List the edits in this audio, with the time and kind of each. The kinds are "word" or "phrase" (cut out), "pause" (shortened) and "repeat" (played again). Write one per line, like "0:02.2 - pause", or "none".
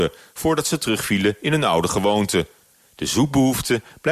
none